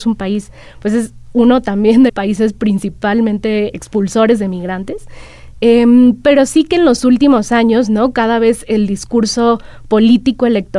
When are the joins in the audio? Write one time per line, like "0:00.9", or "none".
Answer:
0:02.1
0:03.7